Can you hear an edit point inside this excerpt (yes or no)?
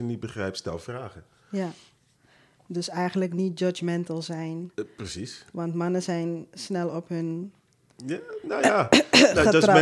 no